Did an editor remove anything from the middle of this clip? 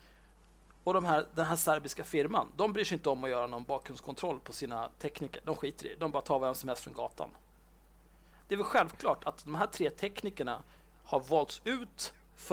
no; 0 cuts

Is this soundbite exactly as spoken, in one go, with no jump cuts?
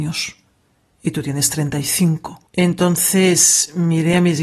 no; 1 cut; at 2.5 s

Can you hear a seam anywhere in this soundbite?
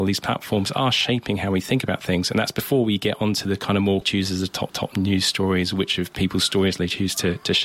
yes; 2 cuts; at 4.0 s, 4.7 s

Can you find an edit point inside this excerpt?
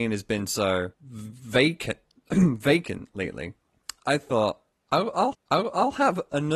yes; 2 cuts; at 0.9 s, 5.3 s

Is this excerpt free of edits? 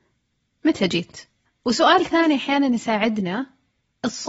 no; 1 cut; at 1.5 s

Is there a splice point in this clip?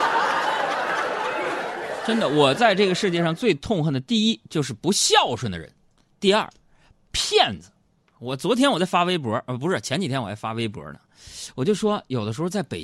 no; 0 cuts

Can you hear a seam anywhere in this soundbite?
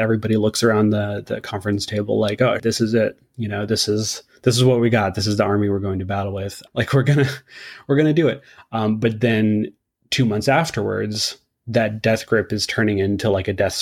no; 0 cuts

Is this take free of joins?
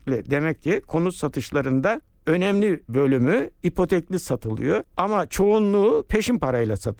no; 2 cuts; at 2.9 s, 4.8 s

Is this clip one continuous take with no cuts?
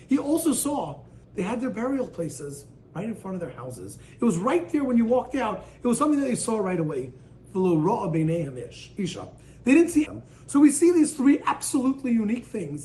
no; 2 cuts; at 1.2 s, 10.0 s

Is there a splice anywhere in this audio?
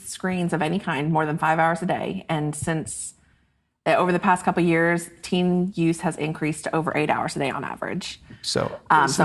no; 0 cuts

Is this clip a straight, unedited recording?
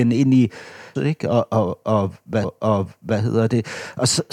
no; 2 cuts; at 1.0 s, 2.4 s

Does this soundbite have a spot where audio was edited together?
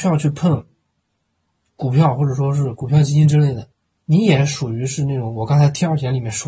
yes; 1 cut; at 3.9 s

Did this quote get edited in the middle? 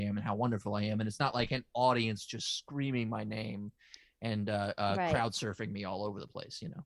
no; 0 cuts

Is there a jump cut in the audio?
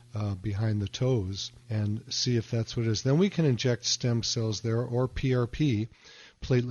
yes; 1 cut; at 1.6 s

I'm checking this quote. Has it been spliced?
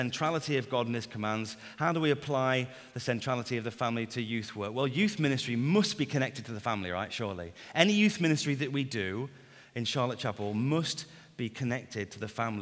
no; 0 cuts

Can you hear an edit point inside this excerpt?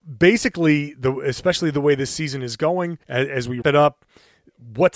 yes; 2 cuts; at 3.0 s, 3.6 s

